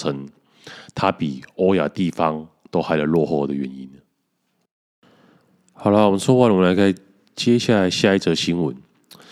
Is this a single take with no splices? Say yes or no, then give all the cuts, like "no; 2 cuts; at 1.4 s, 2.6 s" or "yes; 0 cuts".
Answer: yes; 0 cuts